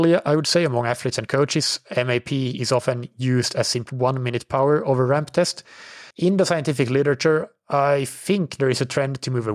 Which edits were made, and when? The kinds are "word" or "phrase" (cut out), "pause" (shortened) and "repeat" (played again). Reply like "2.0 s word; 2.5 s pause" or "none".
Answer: 3.9 s phrase; 6.1 s pause